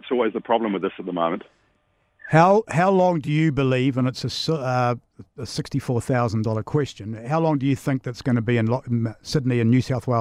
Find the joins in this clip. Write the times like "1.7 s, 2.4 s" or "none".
none

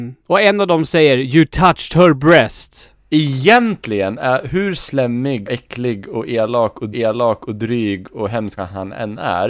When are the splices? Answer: 5.5 s, 6.9 s, 8.6 s

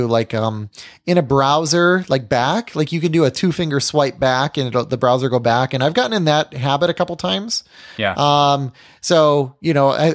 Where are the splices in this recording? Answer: none

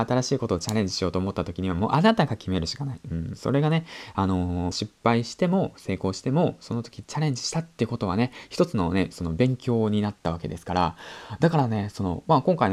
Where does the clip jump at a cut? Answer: 4.7 s

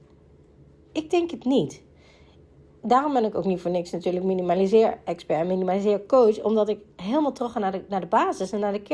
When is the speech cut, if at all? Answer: none

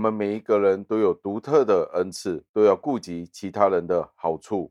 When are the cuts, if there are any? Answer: 2.5 s

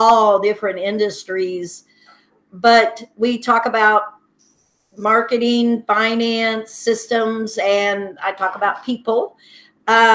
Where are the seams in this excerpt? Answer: none

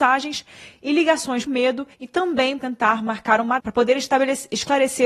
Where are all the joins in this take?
1.5 s, 1.9 s, 2.6 s, 3.6 s

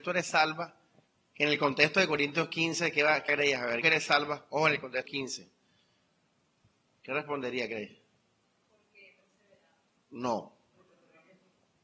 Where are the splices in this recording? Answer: 1.1 s, 3.3 s, 3.8 s, 5.1 s, 8.4 s

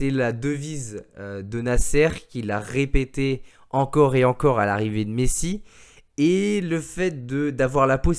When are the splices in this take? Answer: none

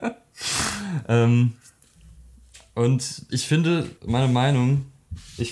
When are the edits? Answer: 3.3 s, 4.0 s

